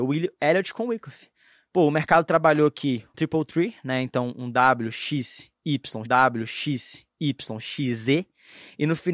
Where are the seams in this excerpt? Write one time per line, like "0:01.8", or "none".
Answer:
0:03.1
0:06.1